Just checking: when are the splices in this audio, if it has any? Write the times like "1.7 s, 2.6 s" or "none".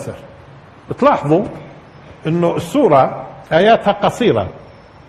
3.4 s